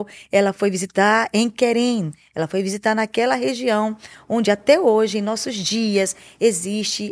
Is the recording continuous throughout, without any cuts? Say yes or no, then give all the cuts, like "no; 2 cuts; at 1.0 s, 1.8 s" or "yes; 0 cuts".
yes; 0 cuts